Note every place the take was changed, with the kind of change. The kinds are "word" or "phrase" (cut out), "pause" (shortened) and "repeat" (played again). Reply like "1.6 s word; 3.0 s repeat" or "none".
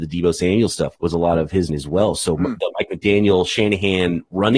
1.0 s word; 1.7 s word